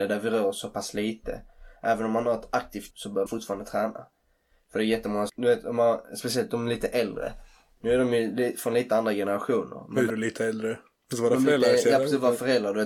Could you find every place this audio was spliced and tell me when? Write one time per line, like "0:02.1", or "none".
0:02.9
0:03.3
0:05.3
0:10.1